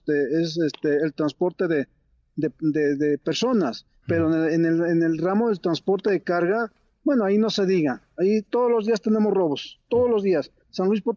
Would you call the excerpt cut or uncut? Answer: uncut